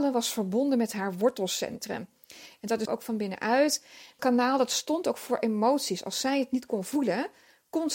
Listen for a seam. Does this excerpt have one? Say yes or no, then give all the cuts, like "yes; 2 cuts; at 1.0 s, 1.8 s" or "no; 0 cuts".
yes; 2 cuts; at 2.9 s, 4.2 s